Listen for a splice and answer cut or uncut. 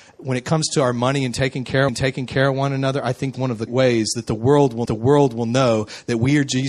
cut